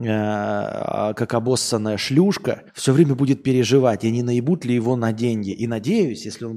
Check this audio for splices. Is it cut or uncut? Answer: cut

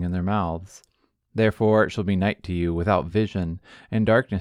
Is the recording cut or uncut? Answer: uncut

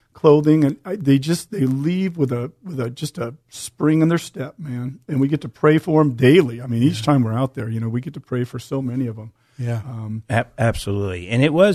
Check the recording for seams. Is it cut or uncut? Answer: uncut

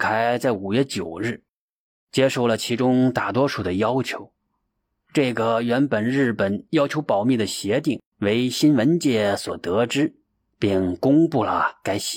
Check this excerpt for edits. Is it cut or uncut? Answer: cut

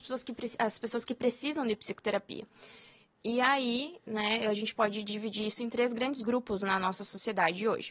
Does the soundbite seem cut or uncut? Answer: uncut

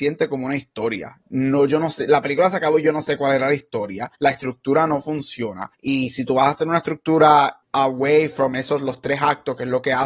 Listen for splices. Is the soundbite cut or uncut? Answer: cut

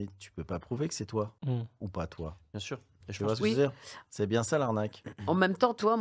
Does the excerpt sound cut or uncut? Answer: cut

